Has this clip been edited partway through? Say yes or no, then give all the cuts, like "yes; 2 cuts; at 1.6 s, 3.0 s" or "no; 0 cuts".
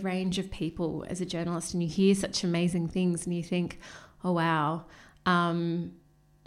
no; 0 cuts